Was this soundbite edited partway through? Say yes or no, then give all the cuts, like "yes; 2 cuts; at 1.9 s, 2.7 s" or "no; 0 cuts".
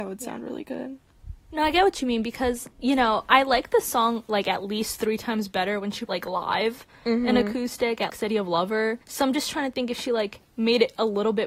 yes; 5 cuts; at 2.7 s, 4.3 s, 6.1 s, 8.1 s, 9.0 s